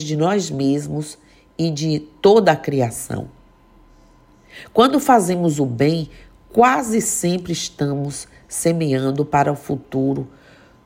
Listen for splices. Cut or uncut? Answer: uncut